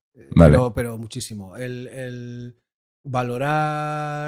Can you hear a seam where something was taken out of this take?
no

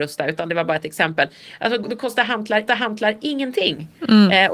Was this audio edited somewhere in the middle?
yes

